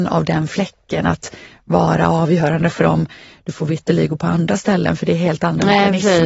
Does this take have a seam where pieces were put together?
no; 0 cuts

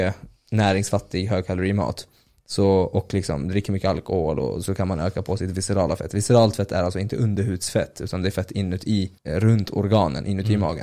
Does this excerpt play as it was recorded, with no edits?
no; 2 cuts; at 4.7 s, 9.2 s

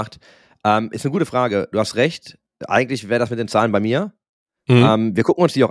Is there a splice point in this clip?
no; 0 cuts

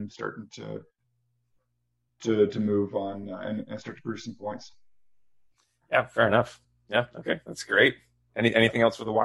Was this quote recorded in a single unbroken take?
yes; 0 cuts

